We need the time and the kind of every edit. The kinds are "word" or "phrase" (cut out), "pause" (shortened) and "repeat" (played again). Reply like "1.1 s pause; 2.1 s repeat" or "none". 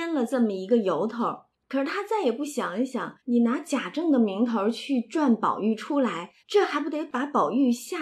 1.5 s pause; 3.2 s pause; 6.4 s pause